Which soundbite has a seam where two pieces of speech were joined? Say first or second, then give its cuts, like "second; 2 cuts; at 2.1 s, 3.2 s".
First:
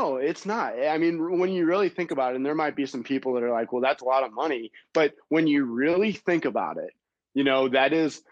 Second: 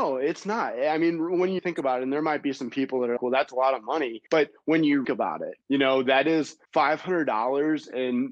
second; 6 cuts; at 1.6 s, 3.2 s, 4.3 s, 5.0 s, 5.6 s, 6.6 s